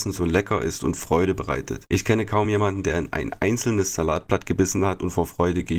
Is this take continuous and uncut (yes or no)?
yes